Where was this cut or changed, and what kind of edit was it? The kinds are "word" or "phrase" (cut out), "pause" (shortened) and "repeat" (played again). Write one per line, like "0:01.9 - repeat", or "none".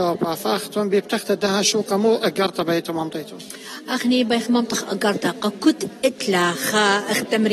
none